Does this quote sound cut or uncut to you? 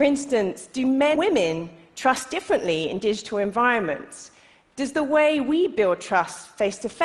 cut